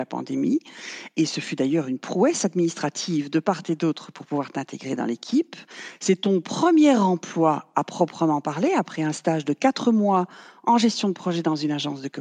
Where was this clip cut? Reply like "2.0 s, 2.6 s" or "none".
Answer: none